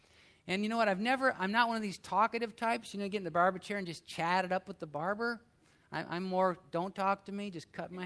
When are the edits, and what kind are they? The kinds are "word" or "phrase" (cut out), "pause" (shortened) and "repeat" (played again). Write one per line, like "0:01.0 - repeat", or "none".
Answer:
none